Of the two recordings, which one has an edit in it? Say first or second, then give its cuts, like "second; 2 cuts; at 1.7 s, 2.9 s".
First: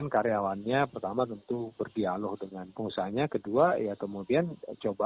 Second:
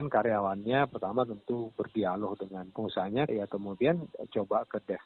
second; 1 cut; at 3.3 s